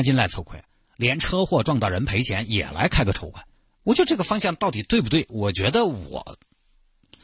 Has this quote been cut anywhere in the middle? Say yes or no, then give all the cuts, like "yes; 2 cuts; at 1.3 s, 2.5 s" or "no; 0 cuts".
yes; 1 cut; at 3.5 s